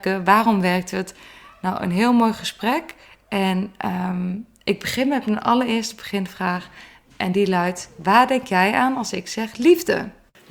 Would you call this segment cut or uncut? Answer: uncut